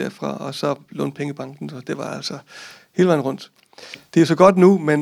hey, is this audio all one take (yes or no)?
yes